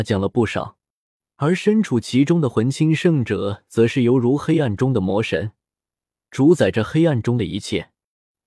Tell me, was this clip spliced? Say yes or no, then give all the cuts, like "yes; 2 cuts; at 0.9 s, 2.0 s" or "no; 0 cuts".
no; 0 cuts